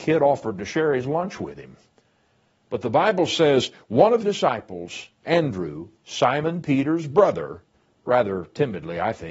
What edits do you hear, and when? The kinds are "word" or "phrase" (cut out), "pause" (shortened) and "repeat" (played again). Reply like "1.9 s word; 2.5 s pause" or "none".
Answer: 4.2 s word; 7.7 s pause